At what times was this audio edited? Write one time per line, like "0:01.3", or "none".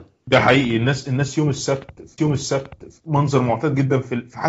0:02.2

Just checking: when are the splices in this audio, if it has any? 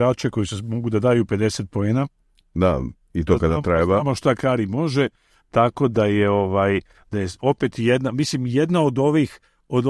none

